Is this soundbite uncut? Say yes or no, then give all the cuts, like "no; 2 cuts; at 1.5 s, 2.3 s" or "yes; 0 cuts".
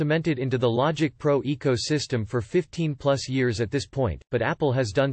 yes; 0 cuts